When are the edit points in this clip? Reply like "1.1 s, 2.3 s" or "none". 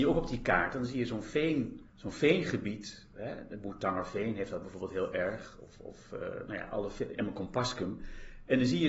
1.9 s